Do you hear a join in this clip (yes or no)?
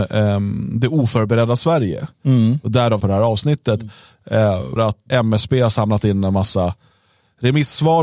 yes